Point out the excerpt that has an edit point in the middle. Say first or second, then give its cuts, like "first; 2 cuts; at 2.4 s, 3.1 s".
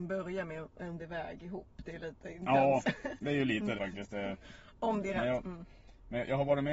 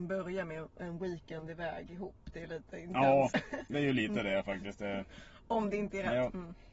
first; 3 cuts; at 1.0 s, 3.8 s, 5.0 s